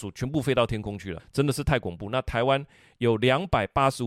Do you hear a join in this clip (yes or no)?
yes